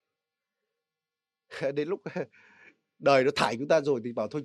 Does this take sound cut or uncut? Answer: uncut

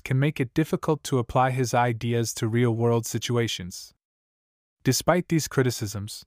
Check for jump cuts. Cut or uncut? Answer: uncut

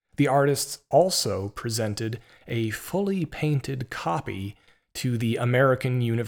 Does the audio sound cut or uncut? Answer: uncut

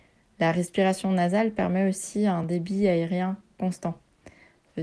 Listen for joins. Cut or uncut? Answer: uncut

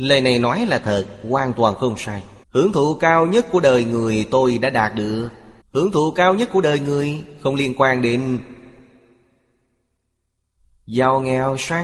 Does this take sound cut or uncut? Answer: cut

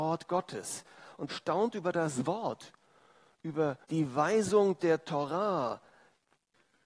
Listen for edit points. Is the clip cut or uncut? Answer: cut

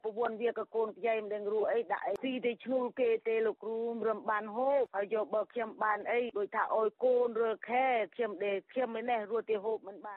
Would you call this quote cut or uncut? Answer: uncut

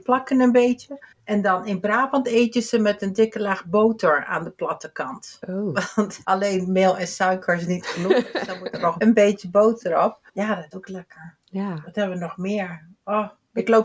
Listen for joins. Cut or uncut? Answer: cut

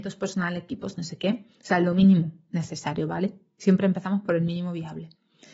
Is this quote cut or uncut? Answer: uncut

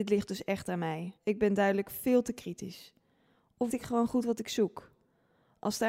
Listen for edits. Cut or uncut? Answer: cut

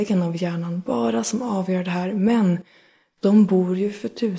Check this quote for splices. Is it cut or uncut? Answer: uncut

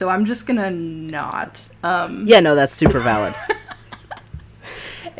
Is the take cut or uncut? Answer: uncut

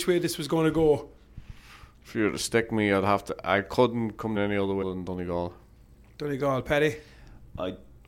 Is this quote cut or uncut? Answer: cut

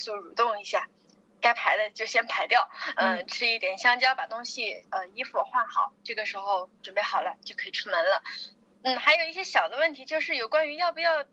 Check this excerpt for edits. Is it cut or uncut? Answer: uncut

